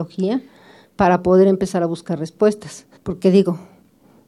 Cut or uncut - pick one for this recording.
cut